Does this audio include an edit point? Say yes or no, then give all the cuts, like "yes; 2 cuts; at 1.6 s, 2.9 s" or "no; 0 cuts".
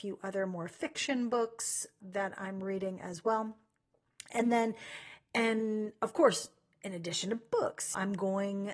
no; 0 cuts